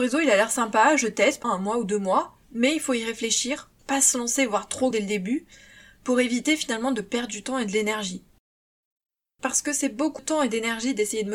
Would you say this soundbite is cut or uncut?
cut